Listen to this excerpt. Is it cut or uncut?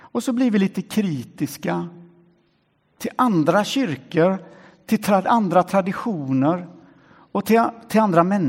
uncut